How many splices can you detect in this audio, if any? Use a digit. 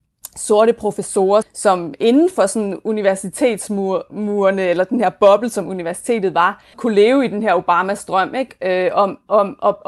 2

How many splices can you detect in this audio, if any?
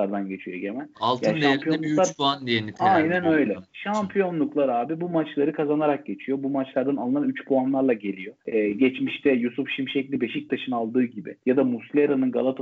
3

